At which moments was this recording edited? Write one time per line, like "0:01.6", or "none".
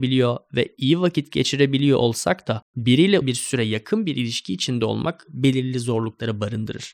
0:03.2

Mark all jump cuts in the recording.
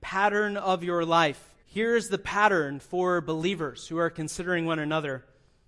0:01.6

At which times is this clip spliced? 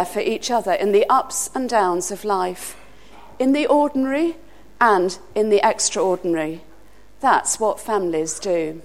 none

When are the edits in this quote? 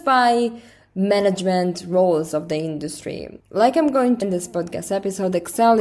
0:03.4
0:04.2

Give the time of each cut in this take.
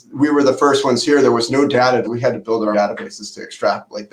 0:02.0
0:02.7

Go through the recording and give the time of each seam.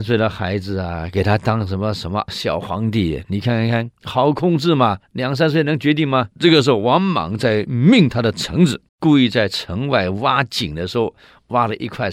0:03.9
0:05.0
0:06.3
0:08.9

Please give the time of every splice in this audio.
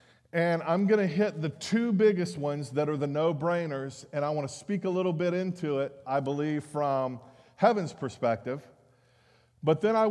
none

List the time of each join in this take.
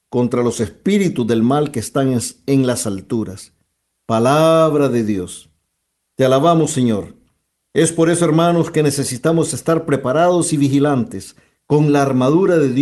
none

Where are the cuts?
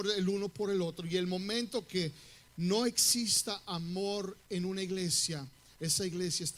none

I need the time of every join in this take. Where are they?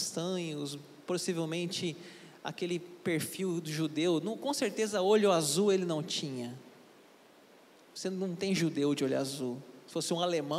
none

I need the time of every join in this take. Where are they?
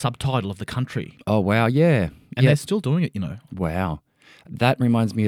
none

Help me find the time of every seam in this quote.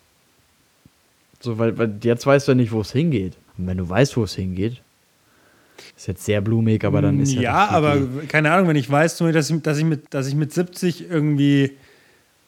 0:03.5
0:05.9
0:10.1

